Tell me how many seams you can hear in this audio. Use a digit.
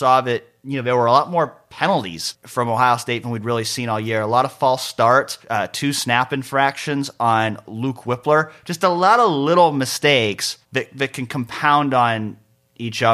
2